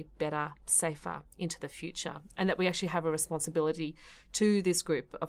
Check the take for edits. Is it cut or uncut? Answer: uncut